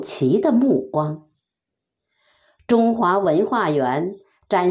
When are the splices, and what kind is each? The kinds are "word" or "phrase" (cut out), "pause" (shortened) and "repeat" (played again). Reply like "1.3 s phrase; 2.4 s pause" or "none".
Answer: none